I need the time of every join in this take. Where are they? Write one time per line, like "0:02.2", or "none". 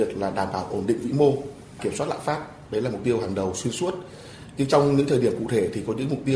0:01.8